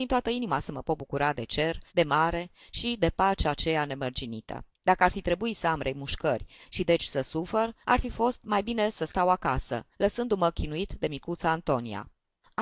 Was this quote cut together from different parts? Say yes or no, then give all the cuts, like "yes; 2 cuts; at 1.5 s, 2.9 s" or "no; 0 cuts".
yes; 4 cuts; at 1.9 s, 4.7 s, 7.8 s, 9.9 s